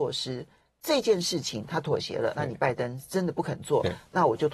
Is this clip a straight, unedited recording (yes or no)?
no